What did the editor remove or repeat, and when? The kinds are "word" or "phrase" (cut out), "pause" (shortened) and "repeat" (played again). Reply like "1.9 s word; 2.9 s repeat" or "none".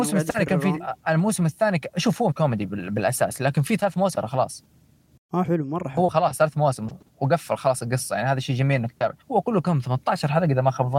1.0 s pause; 2.3 s word; 3.8 s phrase; 4.1 s word; 5.4 s word; 9.2 s pause